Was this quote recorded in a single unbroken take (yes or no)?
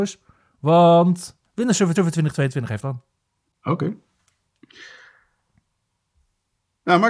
no